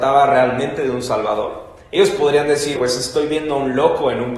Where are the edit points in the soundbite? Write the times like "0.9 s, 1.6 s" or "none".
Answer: 2.7 s